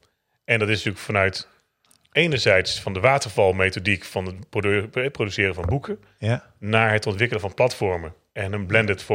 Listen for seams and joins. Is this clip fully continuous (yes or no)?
yes